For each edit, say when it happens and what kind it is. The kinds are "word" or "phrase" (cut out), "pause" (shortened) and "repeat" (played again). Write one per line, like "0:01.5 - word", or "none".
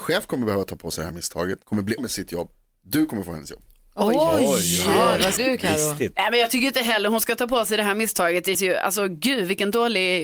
0:01.6 - pause
0:02.0 - word
0:05.4 - word
0:08.5 - word